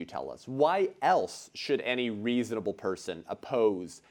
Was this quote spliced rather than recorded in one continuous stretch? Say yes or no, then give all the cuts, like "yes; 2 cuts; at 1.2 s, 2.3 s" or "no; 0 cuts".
no; 0 cuts